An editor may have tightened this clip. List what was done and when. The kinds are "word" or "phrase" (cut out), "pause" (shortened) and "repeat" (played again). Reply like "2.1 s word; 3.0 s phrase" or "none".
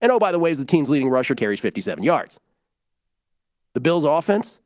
1.3 s word